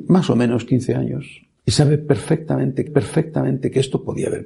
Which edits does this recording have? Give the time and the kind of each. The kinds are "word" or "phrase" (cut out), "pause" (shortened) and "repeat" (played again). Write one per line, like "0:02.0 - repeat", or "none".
0:01.6 - pause
0:02.9 - repeat